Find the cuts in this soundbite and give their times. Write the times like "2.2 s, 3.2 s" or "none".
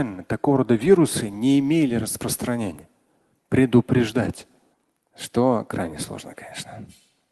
4.7 s